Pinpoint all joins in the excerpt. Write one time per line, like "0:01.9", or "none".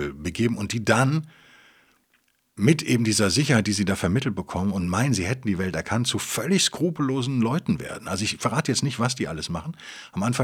none

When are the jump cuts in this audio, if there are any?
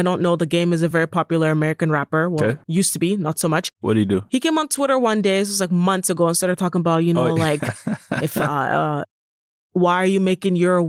none

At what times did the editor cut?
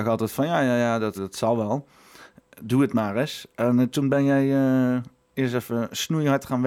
0:01.1

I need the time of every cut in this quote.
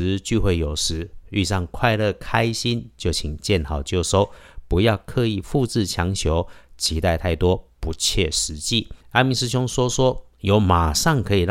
0:09.0

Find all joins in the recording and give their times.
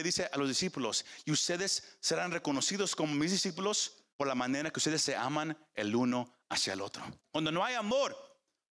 0:04.1
0:07.2

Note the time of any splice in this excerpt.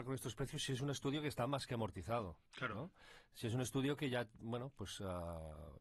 0:02.5

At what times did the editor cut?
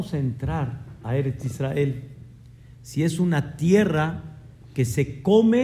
none

